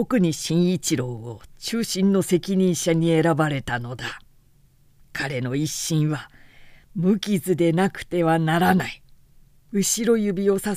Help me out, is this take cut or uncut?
uncut